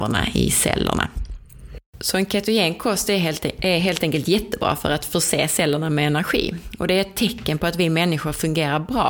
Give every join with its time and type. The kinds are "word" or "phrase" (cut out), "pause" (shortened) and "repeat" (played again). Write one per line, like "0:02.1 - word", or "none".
0:01.9 - pause